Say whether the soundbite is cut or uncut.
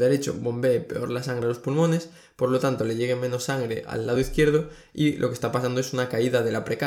uncut